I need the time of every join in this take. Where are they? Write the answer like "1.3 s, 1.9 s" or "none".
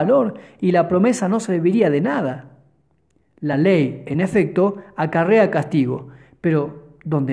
none